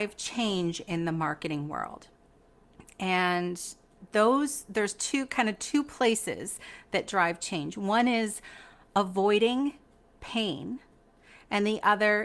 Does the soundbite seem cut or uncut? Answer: uncut